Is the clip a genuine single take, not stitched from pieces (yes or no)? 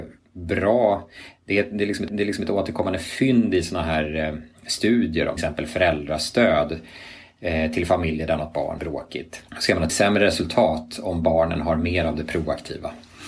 no